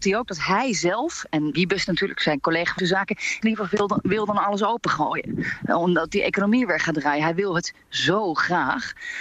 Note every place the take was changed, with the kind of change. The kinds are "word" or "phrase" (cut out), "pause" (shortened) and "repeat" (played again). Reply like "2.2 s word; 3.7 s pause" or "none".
1.5 s word; 2.8 s word; 3.4 s word